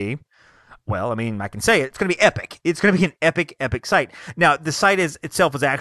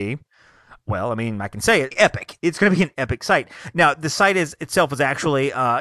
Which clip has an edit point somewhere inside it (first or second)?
second